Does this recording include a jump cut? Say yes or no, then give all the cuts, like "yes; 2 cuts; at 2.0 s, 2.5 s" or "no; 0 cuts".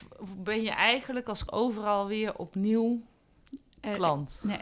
yes; 1 cut; at 1.5 s